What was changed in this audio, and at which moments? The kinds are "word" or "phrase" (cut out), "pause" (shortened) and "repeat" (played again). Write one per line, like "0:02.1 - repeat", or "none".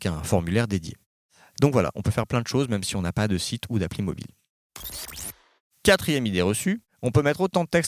none